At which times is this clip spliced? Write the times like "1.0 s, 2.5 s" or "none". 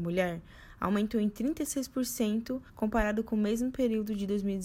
2.7 s